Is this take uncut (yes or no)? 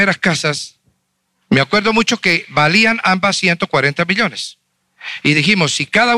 yes